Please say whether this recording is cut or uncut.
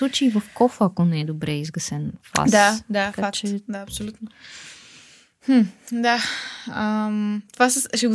uncut